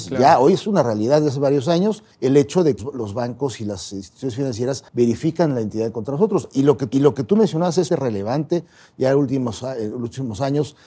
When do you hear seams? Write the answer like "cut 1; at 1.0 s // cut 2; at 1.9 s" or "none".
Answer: cut 1; at 2.1 s // cut 2; at 2.8 s // cut 3; at 4.9 s // cut 4; at 6.9 s // cut 5; at 7.9 s